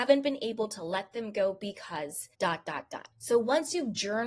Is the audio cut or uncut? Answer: cut